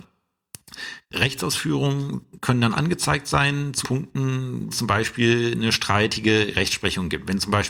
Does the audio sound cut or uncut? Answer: cut